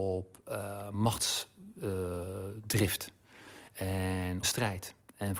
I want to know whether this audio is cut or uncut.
cut